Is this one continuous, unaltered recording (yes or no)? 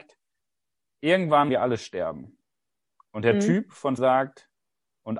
no